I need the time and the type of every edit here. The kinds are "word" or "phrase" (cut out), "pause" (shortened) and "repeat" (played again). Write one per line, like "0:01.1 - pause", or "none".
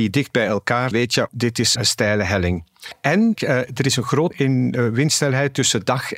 0:00.9 - word
0:01.3 - word
0:01.8 - word
0:03.3 - phrase
0:04.3 - word

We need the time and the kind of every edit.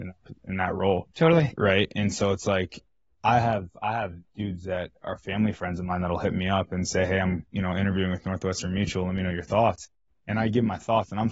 0:04.3 - pause
0:07.5 - pause

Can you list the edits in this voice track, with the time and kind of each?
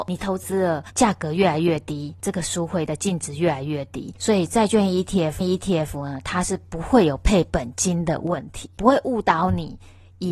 0:05.4 - repeat

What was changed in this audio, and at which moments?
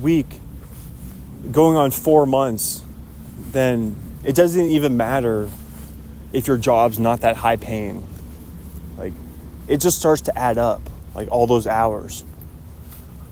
none

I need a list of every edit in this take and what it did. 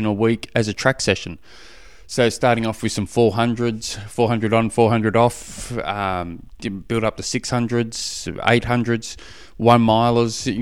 none

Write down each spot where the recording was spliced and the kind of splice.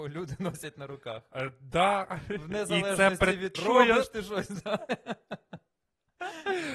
0:03.5 - word

